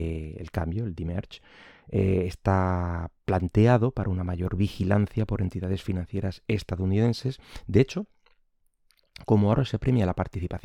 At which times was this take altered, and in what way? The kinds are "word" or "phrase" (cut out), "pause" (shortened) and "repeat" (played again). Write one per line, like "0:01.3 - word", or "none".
0:03.2 - pause